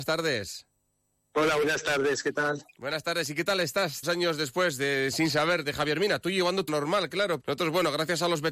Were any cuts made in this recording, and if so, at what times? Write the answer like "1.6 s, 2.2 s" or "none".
4.0 s, 5.1 s, 5.6 s, 6.7 s, 7.4 s